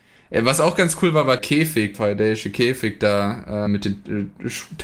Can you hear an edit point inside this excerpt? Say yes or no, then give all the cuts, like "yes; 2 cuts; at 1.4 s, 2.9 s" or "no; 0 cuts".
yes; 3 cuts; at 1.4 s, 1.9 s, 3.7 s